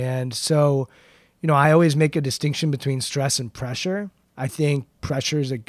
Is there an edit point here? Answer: no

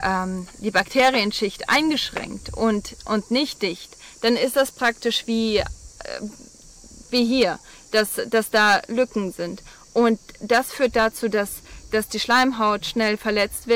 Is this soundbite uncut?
yes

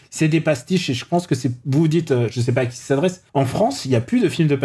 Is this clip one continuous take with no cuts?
no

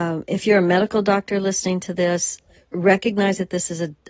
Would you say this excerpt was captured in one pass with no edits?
yes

